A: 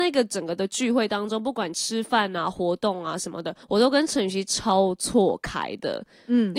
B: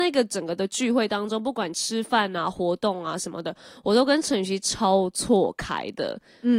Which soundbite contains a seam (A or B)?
A